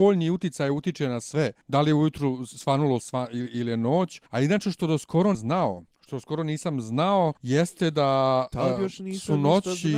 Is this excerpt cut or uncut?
cut